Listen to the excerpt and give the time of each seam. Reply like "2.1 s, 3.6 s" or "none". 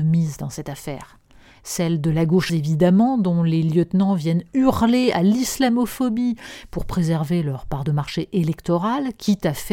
2.5 s